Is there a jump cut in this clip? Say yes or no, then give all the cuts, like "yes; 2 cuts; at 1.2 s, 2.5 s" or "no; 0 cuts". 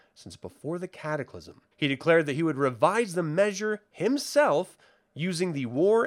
yes; 1 cut; at 1.7 s